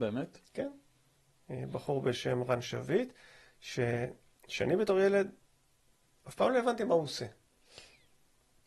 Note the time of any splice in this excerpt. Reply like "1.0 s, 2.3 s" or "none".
none